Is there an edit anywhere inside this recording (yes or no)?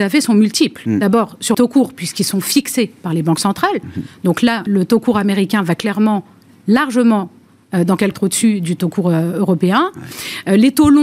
yes